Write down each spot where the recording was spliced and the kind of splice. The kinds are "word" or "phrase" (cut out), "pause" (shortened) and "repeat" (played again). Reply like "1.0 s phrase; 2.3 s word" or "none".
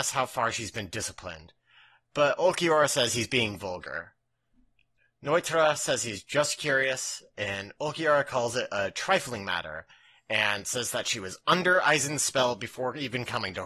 none